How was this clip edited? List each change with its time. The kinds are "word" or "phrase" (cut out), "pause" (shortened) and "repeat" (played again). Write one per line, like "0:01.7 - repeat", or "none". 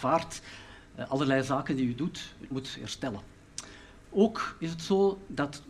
0:02.5 - word